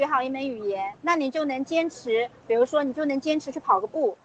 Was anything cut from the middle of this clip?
yes; 1 cut; at 0.9 s

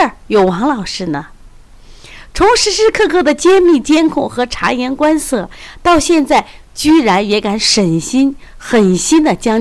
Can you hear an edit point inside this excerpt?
no; 0 cuts

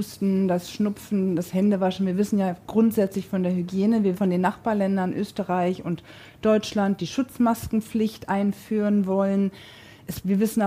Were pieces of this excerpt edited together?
yes; 1 cut; at 4.1 s

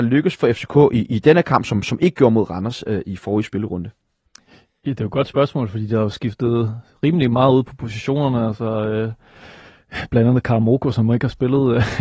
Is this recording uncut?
yes; 0 cuts

